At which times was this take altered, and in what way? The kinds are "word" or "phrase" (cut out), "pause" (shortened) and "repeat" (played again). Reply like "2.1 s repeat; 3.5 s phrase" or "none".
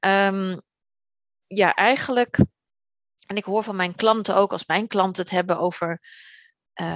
none